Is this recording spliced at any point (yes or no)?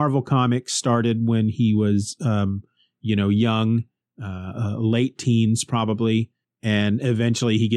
no